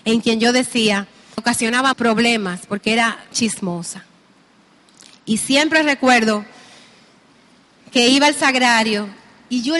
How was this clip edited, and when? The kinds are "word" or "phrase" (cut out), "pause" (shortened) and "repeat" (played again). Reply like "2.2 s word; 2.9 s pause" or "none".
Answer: 1.4 s word; 1.9 s word; 3.3 s word